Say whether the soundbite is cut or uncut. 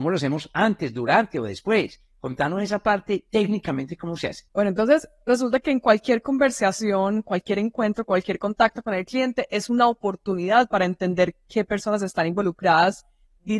cut